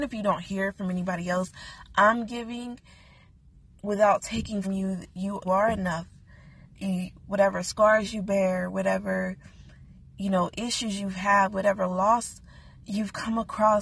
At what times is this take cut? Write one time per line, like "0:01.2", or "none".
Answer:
0:04.6
0:05.4